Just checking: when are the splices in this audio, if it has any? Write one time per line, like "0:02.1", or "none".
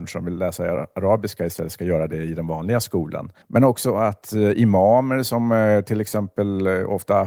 0:03.4